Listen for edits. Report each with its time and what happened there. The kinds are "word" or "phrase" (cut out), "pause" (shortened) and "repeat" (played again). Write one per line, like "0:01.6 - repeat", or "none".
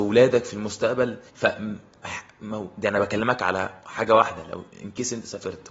0:01.3 - pause